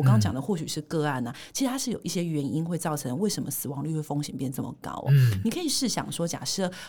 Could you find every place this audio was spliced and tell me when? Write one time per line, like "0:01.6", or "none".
none